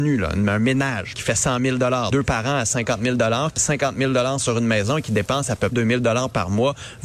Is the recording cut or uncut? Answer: cut